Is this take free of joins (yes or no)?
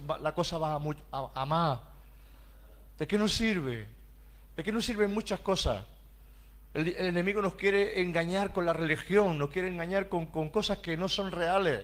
yes